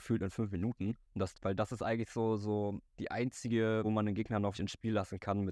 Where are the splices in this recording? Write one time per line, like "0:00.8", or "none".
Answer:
0:01.0
0:01.3
0:02.9
0:03.8
0:04.5